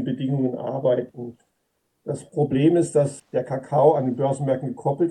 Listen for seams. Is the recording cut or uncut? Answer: uncut